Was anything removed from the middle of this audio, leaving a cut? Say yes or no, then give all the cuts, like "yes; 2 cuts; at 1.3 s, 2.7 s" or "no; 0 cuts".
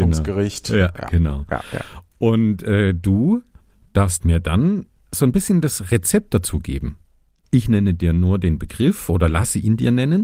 no; 0 cuts